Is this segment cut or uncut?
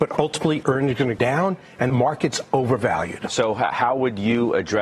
cut